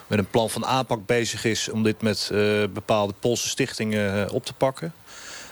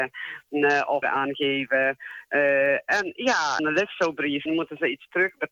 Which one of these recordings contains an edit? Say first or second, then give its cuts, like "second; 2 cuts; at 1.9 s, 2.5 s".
second; 3 cuts; at 1.0 s, 3.6 s, 4.5 s